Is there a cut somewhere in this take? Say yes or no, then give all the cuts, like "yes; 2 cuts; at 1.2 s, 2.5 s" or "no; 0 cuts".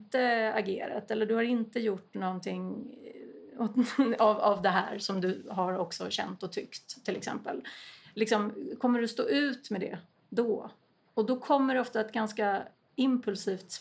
no; 0 cuts